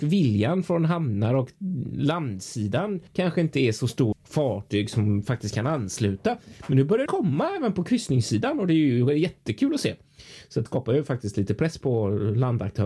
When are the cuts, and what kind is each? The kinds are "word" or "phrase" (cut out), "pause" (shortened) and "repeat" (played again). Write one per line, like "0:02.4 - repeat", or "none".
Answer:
0:03.1 - pause
0:04.1 - phrase
0:07.1 - word
0:10.7 - word